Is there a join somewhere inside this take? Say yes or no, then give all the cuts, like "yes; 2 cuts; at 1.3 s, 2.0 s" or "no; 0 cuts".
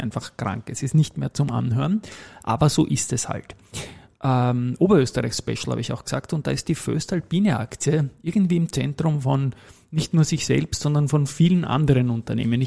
no; 0 cuts